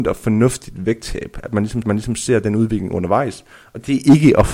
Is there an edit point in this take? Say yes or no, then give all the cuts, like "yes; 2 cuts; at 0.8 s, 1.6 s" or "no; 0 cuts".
yes; 1 cut; at 1.8 s